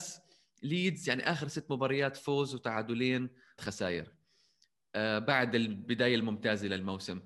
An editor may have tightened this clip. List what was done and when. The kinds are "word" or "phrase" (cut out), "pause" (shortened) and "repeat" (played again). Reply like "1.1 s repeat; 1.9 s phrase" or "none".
3.6 s word